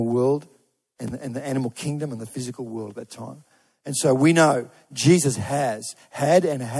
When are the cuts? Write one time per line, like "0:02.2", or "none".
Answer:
none